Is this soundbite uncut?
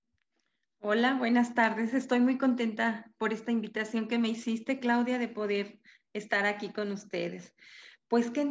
yes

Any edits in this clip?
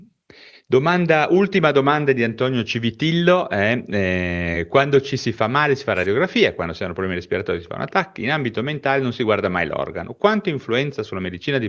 no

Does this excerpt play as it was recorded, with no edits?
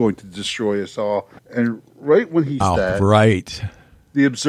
no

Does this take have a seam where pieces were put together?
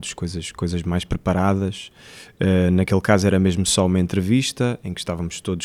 no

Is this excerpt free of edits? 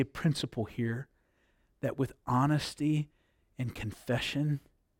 yes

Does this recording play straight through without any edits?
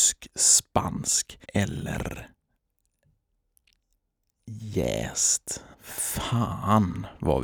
no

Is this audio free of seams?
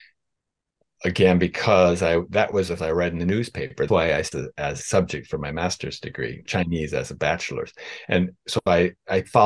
no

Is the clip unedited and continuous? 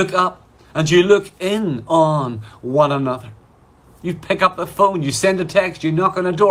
yes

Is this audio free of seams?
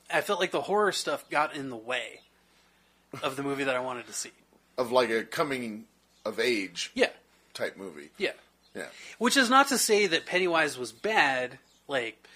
yes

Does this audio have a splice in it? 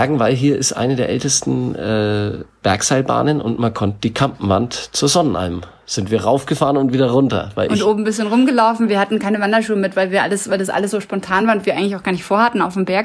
no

